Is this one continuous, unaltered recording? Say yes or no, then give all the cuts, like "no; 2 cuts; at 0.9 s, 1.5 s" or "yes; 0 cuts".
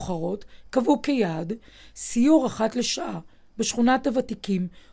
yes; 0 cuts